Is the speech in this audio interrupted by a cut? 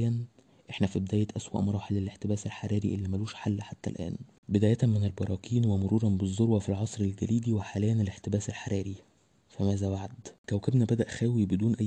no; 0 cuts

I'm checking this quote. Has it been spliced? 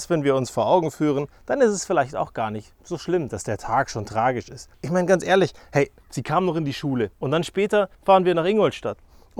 yes; 4 cuts; at 4.7 s, 6.0 s, 7.1 s, 7.9 s

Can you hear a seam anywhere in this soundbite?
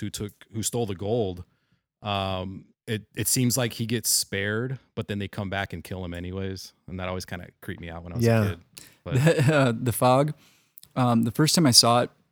yes; 1 cut; at 2.7 s

